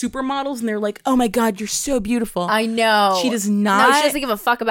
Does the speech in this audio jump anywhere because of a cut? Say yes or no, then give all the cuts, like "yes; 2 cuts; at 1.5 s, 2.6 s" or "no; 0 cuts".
no; 0 cuts